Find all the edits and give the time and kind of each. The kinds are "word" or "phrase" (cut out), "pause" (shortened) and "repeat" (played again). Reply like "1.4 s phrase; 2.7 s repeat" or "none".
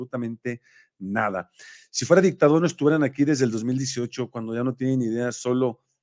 none